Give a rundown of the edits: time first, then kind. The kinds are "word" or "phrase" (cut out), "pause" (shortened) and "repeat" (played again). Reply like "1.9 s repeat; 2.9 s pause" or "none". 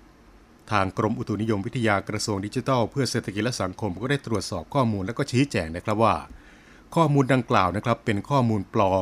none